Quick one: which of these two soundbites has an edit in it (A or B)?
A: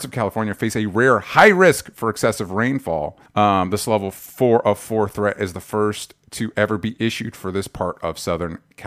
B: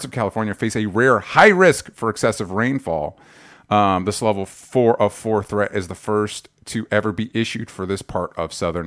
A